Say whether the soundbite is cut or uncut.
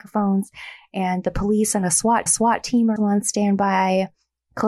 cut